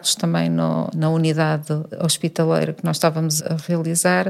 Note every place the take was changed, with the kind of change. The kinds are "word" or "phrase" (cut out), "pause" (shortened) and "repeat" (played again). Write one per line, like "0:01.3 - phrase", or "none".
0:03.4 - word